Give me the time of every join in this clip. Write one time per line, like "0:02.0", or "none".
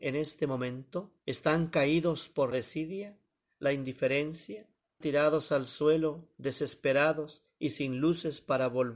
0:01.2
0:02.5
0:05.0